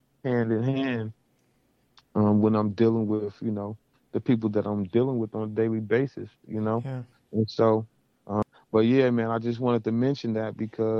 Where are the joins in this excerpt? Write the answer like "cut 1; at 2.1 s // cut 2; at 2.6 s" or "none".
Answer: none